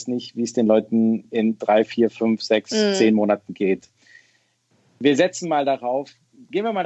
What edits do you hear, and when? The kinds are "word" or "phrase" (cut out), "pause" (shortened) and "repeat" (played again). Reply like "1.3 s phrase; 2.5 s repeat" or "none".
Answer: none